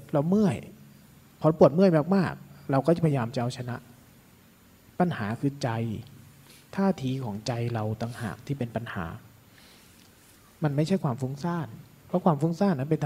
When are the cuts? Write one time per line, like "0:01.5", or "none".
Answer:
none

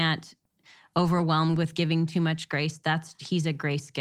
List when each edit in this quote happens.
0:01.6

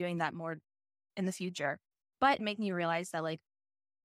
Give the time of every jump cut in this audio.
0:02.4

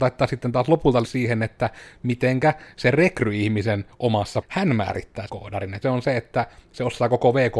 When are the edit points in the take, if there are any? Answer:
0:01.0
0:04.4
0:05.3
0:05.8

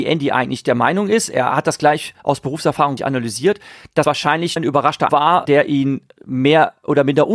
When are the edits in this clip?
0:02.2
0:03.0
0:04.0
0:04.6
0:05.1
0:05.5

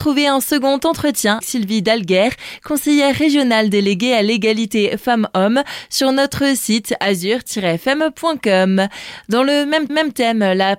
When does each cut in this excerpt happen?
0:01.4
0:09.9

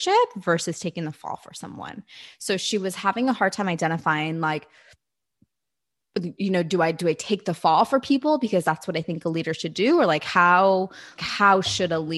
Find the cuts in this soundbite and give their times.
0:11.2

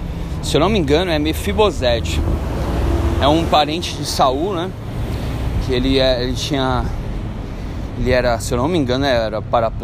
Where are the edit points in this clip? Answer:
none

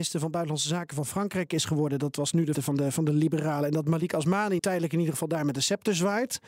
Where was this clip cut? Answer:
0:02.5
0:04.6

